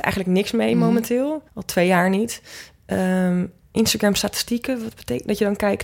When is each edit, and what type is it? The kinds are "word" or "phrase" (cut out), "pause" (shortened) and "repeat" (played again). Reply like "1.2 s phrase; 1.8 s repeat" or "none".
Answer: 1.5 s pause